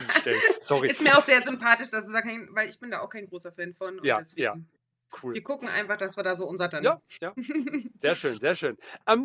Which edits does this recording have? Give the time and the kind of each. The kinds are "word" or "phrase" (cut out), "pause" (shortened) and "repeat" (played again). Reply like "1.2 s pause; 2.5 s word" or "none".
6.7 s phrase